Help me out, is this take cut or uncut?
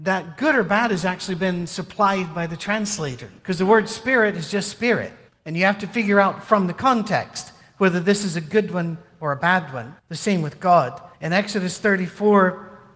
cut